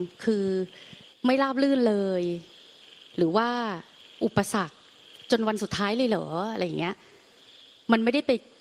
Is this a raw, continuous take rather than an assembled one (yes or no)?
no